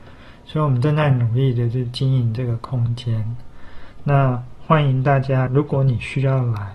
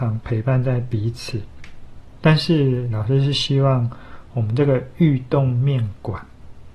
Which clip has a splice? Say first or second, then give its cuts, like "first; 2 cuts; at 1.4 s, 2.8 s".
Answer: first; 1 cut; at 5.5 s